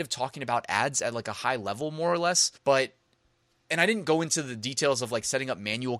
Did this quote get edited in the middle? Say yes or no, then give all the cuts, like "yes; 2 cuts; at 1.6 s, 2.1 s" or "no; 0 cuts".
yes; 1 cut; at 2.6 s